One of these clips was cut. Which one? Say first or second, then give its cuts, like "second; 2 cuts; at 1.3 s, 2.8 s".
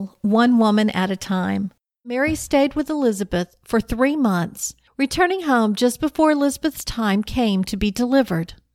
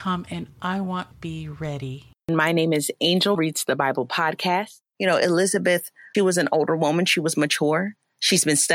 second; 4 cuts; at 1.1 s, 2.1 s, 3.3 s, 6.1 s